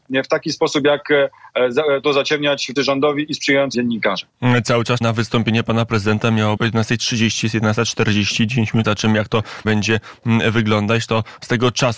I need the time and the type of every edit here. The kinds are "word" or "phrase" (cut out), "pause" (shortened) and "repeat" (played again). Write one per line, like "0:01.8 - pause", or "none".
0:02.0 - word
0:02.8 - word
0:03.7 - word
0:05.0 - word
0:06.6 - word
0:08.8 - word
0:09.6 - word